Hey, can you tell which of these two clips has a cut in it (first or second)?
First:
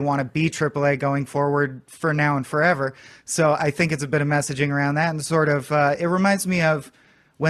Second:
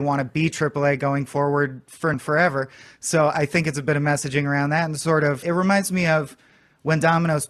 second